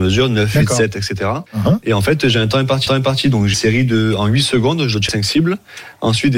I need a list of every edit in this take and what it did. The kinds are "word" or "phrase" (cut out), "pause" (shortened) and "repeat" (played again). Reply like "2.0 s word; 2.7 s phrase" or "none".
1.5 s pause; 2.9 s repeat; 3.5 s word; 5.1 s phrase